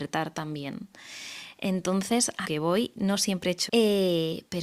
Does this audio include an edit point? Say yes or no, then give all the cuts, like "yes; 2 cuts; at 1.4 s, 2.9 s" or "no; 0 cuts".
yes; 2 cuts; at 2.4 s, 3.7 s